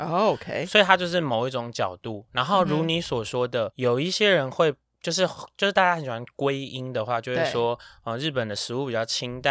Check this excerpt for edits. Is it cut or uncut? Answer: cut